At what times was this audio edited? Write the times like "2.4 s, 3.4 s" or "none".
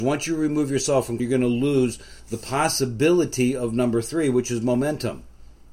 1.2 s